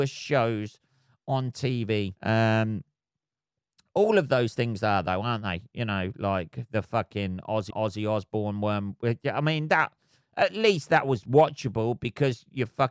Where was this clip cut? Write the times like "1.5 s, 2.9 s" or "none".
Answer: 2.2 s, 7.7 s